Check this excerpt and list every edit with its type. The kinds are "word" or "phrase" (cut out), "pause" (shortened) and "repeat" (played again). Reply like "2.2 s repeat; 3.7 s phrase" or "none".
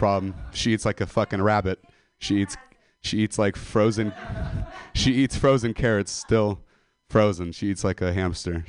none

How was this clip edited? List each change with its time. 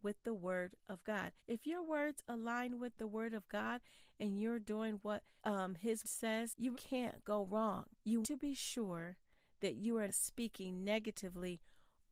1.4 s pause; 5.4 s pause; 6.0 s word; 6.7 s word; 8.2 s word; 10.1 s word

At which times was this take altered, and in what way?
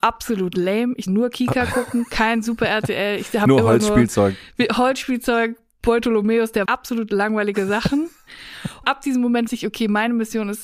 1.1 s word; 6.7 s word; 8.8 s phrase; 9.5 s word

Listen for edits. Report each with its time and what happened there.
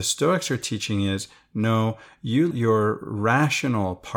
2.5 s word

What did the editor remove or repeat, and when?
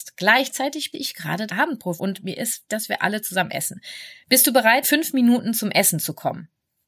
0.9 s word; 1.5 s word; 2.0 s word; 2.7 s word; 4.8 s word

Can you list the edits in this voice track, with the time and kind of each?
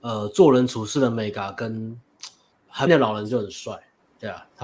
2.9 s word

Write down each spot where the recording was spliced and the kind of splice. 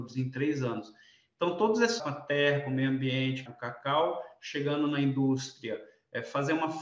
2.0 s word; 3.5 s phrase

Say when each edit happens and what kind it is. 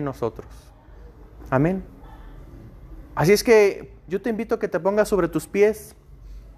none

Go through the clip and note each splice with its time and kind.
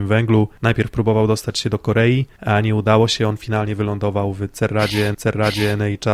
5.1 s repeat

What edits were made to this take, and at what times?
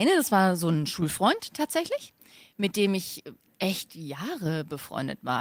none

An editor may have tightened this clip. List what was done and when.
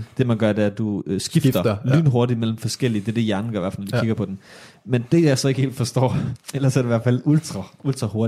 none

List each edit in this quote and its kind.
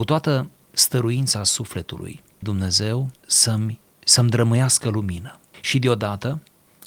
2.4 s phrase; 3.1 s pause

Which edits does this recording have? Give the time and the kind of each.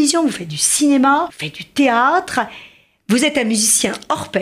1.3 s word

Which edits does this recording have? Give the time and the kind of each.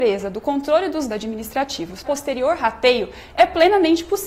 1.1 s word; 2.0 s word

